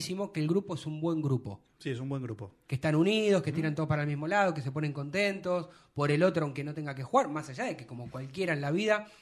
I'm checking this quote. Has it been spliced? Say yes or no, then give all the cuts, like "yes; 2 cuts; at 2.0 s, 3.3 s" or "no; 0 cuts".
no; 0 cuts